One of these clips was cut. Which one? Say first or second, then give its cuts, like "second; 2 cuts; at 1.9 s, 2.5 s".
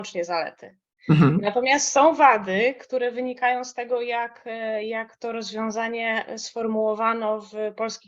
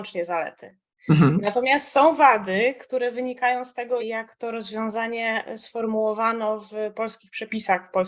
second; 1 cut; at 4.0 s